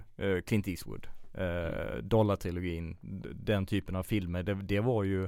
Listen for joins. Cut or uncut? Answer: uncut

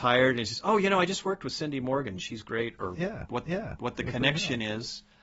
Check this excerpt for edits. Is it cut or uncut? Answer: cut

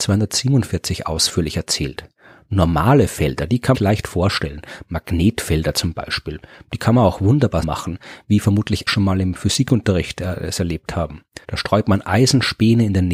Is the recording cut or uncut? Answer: cut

